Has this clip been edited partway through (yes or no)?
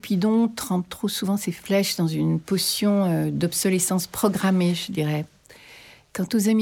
no